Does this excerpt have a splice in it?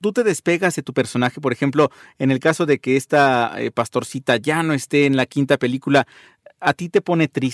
no; 0 cuts

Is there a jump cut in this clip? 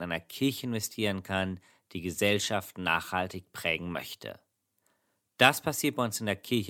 no; 0 cuts

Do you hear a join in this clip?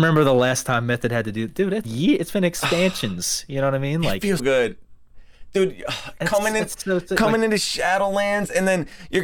yes; 2 cuts; at 1.8 s, 4.4 s

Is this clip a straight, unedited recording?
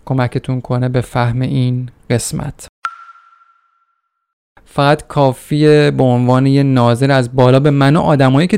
yes; 0 cuts

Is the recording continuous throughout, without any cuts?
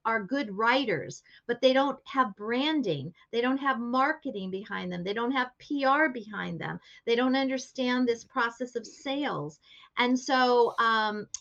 yes; 0 cuts

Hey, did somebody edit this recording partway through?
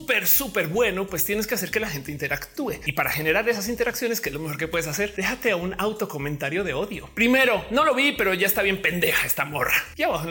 no; 0 cuts

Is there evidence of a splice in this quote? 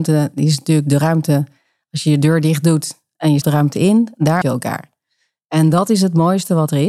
yes; 2 cuts; at 3.4 s, 4.4 s

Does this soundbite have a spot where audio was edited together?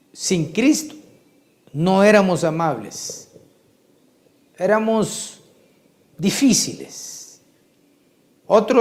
no; 0 cuts

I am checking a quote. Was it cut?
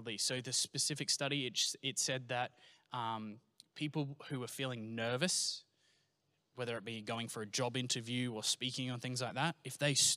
no; 0 cuts

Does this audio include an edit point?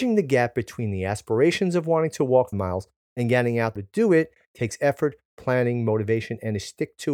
yes; 2 cuts; at 2.5 s, 3.8 s

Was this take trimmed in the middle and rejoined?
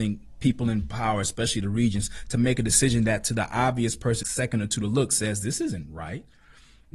yes; 1 cut; at 4.2 s

